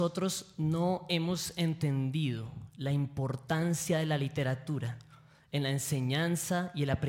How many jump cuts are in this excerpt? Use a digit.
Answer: 0